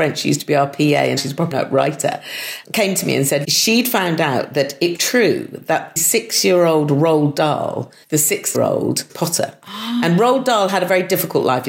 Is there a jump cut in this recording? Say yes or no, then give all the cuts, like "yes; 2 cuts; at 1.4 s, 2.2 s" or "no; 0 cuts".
yes; 9 cuts; at 1.2 s, 1.5 s, 2.6 s, 3.4 s, 5.0 s, 6.0 s, 8.0 s, 8.5 s, 9.1 s